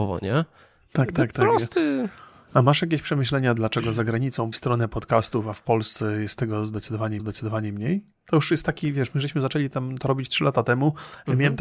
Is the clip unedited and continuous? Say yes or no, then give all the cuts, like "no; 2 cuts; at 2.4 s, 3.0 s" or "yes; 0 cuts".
no; 3 cuts; at 3.6 s, 4.5 s, 7.2 s